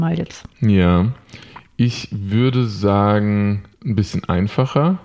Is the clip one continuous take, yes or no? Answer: no